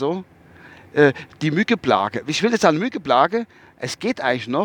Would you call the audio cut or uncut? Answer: uncut